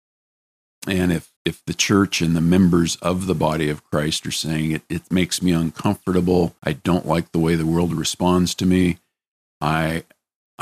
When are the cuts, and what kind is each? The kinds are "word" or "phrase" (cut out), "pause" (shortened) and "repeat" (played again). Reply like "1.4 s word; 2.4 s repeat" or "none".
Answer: 1.4 s pause; 6.6 s pause